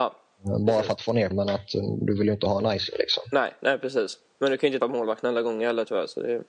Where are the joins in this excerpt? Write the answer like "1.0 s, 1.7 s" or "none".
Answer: 1.3 s, 4.8 s